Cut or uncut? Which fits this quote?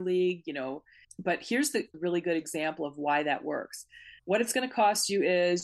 cut